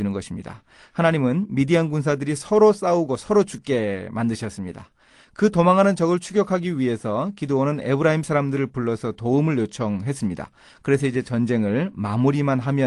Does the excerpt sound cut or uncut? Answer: uncut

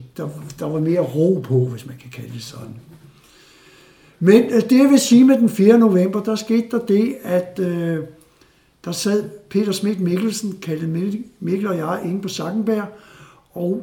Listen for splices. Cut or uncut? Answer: uncut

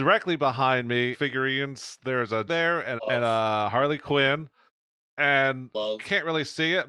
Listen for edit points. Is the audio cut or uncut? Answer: cut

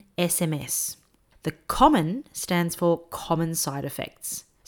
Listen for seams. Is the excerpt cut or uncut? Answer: uncut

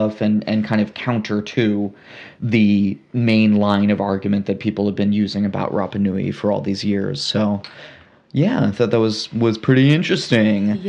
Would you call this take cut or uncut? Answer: uncut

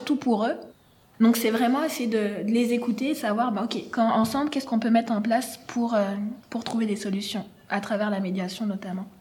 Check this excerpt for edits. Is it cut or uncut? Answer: uncut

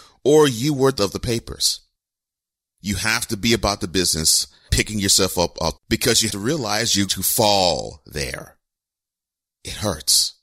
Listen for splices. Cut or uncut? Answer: cut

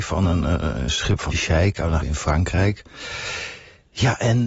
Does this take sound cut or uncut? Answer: cut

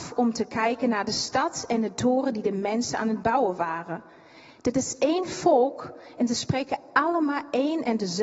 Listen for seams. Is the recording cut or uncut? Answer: uncut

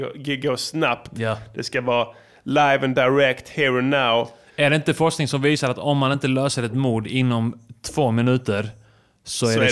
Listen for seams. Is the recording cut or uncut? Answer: uncut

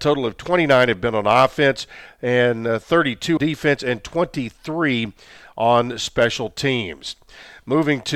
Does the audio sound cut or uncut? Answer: cut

